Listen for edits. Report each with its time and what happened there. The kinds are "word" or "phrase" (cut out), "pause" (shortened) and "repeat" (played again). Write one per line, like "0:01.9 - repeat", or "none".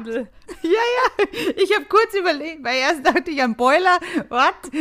none